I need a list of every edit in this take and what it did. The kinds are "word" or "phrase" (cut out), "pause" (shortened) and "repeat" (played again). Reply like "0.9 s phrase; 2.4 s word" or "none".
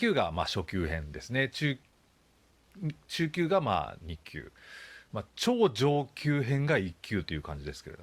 5.3 s pause